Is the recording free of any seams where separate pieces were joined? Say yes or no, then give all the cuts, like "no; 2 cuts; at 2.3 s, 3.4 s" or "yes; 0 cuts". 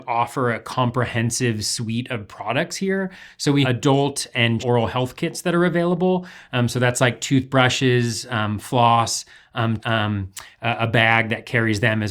no; 3 cuts; at 3.6 s, 4.6 s, 9.8 s